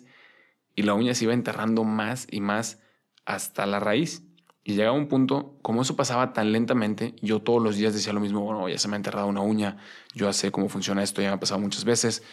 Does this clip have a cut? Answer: no; 0 cuts

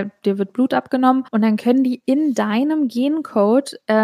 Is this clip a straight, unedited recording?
no; 1 cut; at 1.3 s

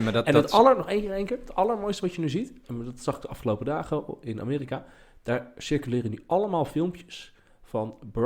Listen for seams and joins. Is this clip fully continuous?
yes; 0 cuts

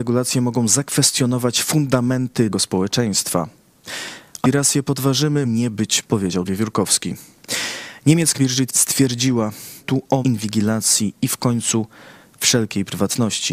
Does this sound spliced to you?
yes; 9 cuts; at 2.5 s, 4.4 s, 5.4 s, 6.0 s, 6.5 s, 8.3 s, 8.7 s, 9.8 s, 10.2 s

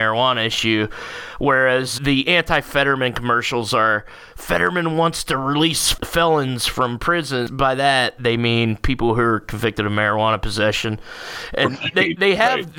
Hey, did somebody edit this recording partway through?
yes; 1 cut; at 2.0 s

